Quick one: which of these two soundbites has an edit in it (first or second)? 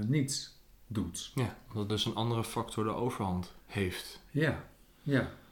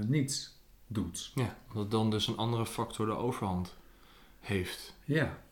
first